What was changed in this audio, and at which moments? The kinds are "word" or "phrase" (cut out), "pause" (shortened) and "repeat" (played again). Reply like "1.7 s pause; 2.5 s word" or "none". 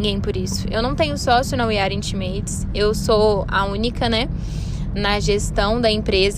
none